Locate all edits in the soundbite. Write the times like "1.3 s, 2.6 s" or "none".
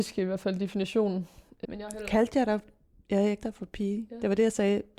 1.6 s, 3.4 s

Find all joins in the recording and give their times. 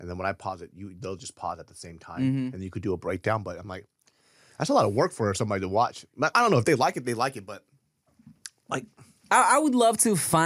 none

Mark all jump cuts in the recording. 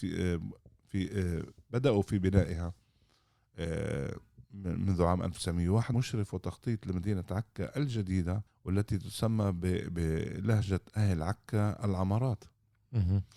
4.4 s, 5.9 s, 8.5 s

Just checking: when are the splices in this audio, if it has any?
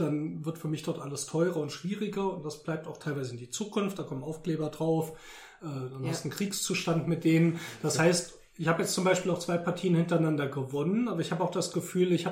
none

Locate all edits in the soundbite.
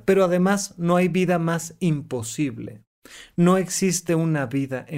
none

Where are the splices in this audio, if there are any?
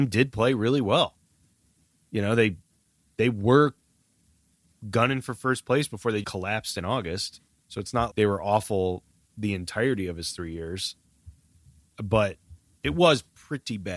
6.2 s, 8.1 s

